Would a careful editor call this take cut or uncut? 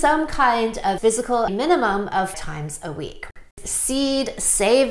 cut